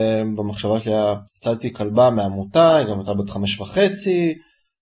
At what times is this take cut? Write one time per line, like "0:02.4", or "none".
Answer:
0:01.3